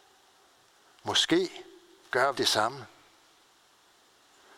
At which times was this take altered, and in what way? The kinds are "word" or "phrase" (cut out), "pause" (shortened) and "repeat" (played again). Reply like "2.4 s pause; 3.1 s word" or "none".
2.3 s word